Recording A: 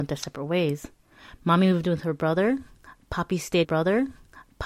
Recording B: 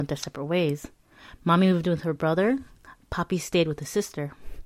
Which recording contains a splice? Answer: A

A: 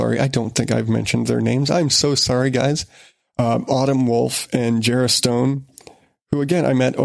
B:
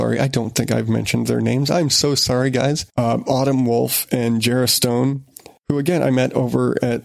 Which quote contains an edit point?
B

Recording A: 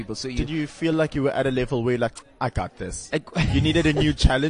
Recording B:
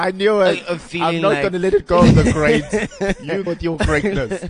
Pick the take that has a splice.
B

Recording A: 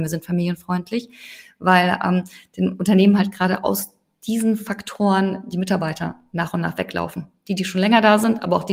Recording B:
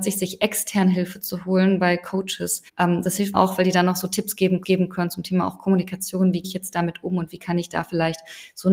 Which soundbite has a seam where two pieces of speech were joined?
B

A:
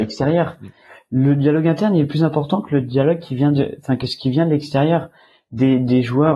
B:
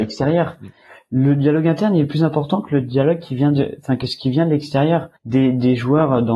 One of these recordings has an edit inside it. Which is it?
B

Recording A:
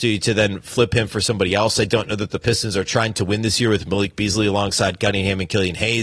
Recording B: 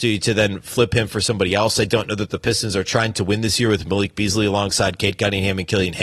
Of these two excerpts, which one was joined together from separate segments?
A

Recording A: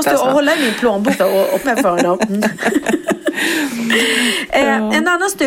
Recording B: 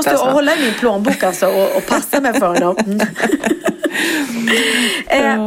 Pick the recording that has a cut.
A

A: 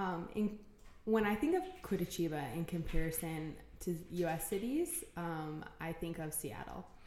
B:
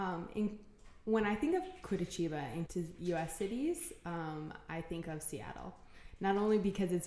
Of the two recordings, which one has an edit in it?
B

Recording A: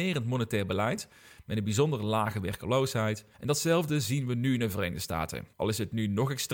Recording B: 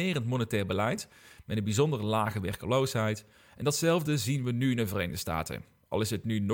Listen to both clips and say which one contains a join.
A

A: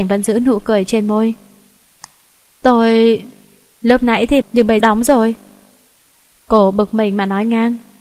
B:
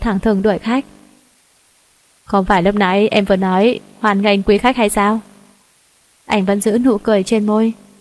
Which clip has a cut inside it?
A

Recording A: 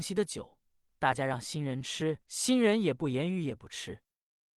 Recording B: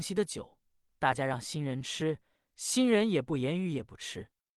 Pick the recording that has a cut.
A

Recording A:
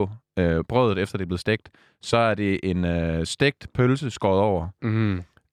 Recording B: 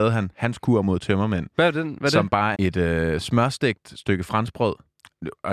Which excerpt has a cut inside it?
B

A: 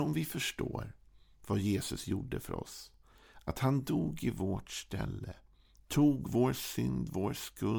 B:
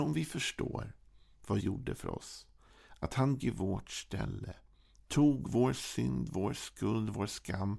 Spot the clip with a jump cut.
B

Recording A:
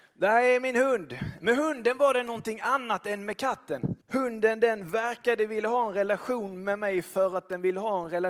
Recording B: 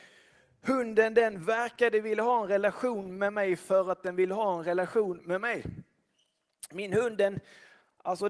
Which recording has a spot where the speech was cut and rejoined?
A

